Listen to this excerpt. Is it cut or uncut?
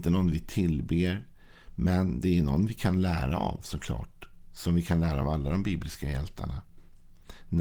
uncut